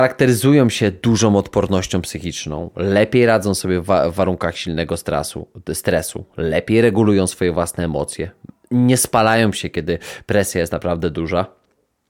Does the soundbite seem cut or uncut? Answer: uncut